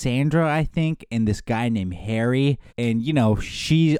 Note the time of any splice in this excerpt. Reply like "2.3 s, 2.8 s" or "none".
2.7 s